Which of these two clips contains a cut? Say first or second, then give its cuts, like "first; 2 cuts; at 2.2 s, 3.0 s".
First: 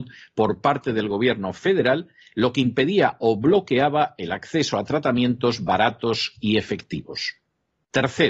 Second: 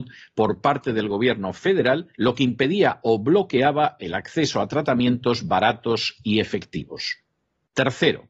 second; 1 cut; at 2.1 s